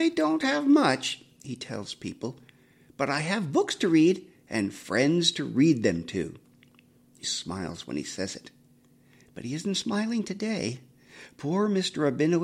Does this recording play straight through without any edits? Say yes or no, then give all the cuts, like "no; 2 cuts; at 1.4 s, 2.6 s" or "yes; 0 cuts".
no; 1 cut; at 7.2 s